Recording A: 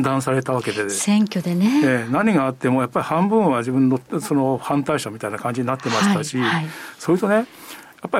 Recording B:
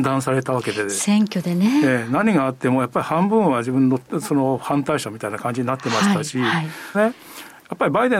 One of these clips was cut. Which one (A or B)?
B